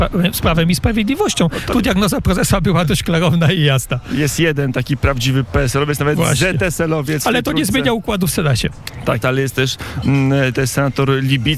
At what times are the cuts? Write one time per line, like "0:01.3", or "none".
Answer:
0:09.2